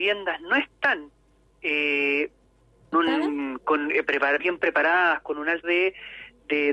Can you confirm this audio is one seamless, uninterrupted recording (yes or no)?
no